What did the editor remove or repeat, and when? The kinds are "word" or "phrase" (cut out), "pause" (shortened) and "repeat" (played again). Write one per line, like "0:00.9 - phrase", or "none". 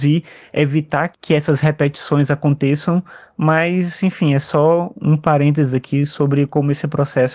none